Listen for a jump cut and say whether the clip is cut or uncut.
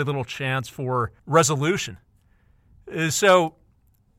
cut